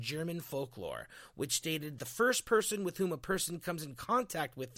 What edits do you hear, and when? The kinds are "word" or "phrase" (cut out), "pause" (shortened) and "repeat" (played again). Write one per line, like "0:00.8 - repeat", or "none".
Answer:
0:02.0 - phrase